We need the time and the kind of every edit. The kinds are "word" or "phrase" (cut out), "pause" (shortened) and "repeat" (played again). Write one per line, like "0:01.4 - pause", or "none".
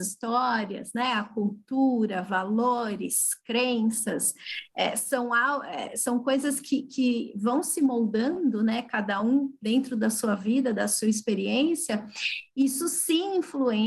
none